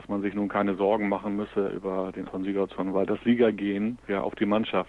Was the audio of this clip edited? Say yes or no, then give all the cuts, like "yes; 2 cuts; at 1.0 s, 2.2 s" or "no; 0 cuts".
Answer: yes; 1 cut; at 2.3 s